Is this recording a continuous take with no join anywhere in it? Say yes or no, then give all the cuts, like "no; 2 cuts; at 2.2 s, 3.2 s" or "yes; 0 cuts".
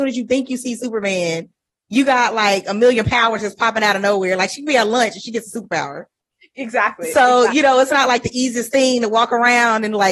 yes; 0 cuts